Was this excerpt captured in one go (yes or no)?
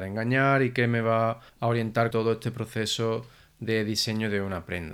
no